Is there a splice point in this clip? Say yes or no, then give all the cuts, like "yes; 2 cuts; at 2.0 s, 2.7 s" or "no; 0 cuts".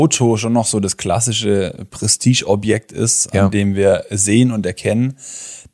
no; 0 cuts